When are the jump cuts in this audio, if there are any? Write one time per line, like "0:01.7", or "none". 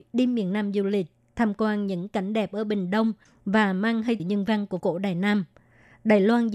0:04.2
0:04.8